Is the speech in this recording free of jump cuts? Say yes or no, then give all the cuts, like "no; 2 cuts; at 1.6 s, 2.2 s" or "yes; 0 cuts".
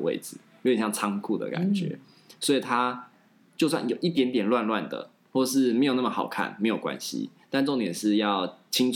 yes; 0 cuts